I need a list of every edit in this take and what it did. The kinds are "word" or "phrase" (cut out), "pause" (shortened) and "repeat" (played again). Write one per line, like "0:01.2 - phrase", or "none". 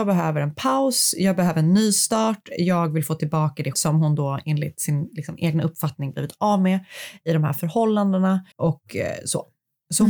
0:03.7 - word
0:08.5 - pause